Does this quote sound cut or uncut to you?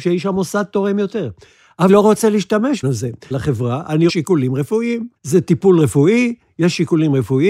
cut